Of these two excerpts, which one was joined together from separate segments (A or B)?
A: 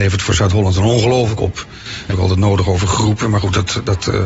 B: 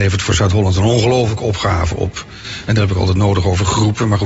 A